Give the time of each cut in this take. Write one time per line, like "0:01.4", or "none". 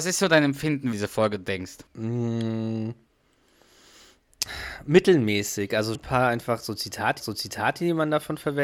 0:00.9
0:01.9
0:05.9
0:07.2